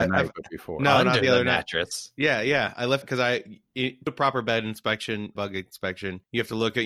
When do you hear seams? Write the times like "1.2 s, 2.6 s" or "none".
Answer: 3.0 s, 4.1 s, 5.4 s